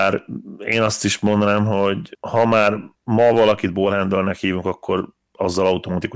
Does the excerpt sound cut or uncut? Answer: uncut